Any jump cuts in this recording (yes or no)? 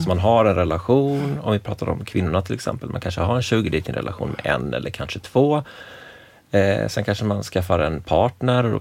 no